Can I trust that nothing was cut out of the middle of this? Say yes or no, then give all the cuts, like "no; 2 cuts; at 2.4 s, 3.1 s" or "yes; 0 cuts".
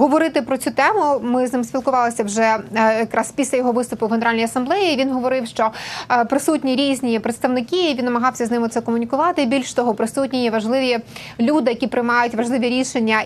yes; 0 cuts